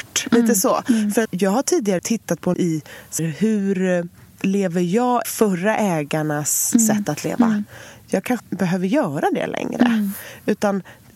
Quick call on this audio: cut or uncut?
cut